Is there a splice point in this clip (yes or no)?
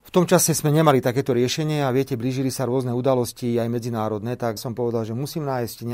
yes